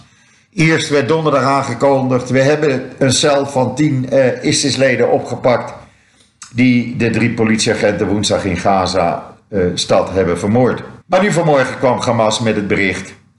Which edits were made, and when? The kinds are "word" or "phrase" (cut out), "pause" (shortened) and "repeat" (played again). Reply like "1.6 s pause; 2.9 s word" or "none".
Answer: 11.0 s pause